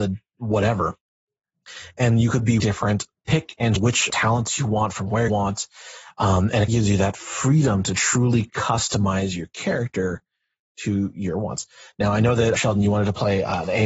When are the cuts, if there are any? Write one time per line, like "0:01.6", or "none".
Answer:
0:02.6
0:03.8
0:04.1
0:05.3
0:06.7
0:12.5